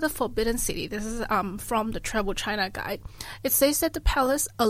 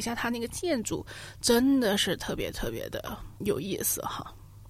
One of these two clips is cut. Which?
second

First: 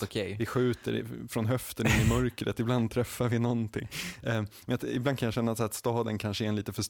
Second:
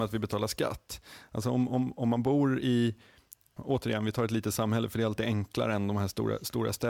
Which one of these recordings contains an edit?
second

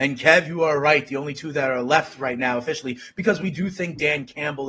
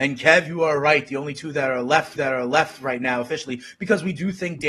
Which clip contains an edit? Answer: second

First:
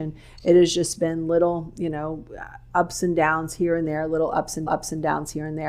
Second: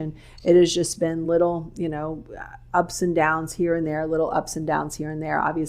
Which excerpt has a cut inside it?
first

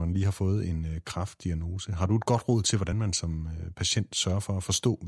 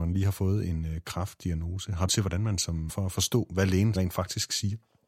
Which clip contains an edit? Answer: second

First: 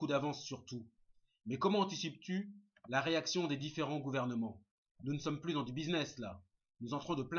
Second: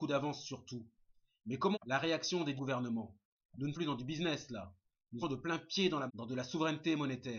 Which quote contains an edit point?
second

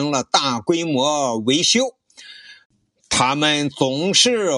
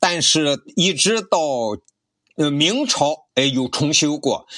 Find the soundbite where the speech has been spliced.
second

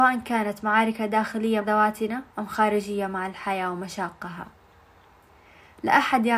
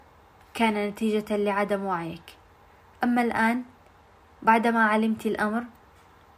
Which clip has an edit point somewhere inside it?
first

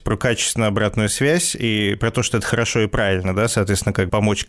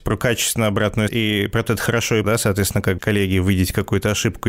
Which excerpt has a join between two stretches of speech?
second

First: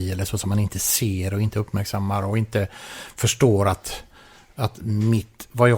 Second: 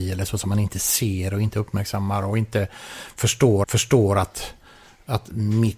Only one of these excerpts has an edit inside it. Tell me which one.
second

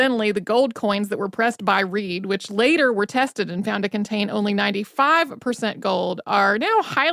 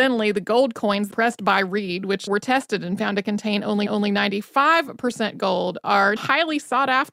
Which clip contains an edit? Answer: second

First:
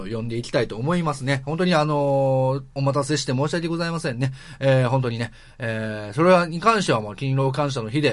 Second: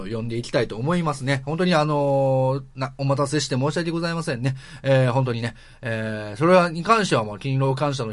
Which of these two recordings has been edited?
first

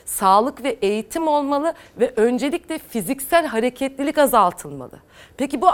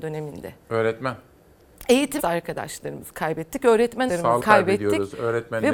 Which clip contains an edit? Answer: second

